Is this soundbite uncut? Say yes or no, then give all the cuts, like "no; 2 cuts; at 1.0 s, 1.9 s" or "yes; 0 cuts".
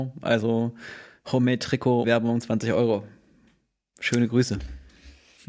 no; 1 cut; at 2.0 s